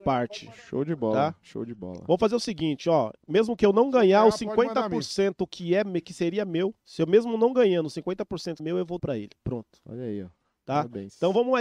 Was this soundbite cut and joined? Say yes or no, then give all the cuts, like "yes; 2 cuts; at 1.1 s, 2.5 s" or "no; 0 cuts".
yes; 3 cuts; at 6.8 s, 8.6 s, 9.0 s